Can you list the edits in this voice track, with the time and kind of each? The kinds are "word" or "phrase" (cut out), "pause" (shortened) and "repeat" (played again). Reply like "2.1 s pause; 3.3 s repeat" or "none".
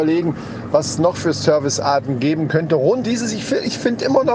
3.0 s word